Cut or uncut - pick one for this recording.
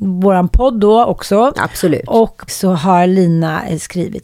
cut